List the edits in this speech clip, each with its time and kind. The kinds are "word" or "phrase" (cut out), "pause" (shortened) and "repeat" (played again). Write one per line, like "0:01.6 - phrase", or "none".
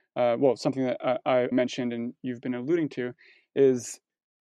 0:01.5 - word